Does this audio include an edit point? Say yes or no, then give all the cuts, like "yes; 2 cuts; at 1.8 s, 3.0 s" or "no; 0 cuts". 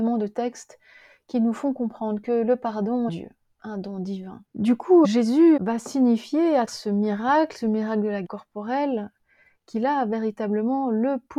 yes; 6 cuts; at 3.1 s, 4.5 s, 5.0 s, 5.6 s, 6.7 s, 8.2 s